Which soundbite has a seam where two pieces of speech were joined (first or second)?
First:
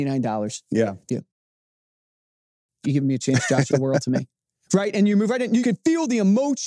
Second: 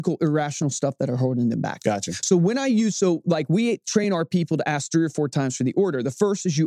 first